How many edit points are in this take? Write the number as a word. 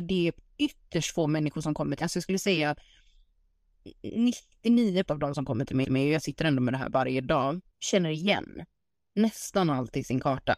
four